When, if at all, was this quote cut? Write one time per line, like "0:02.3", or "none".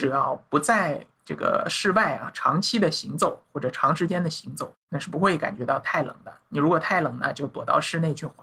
0:01.1
0:04.8